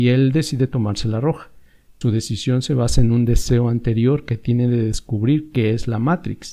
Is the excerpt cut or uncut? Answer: cut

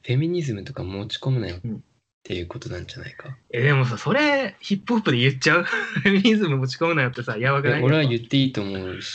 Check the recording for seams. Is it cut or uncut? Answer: uncut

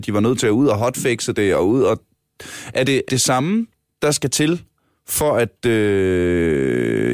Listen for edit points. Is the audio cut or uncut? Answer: cut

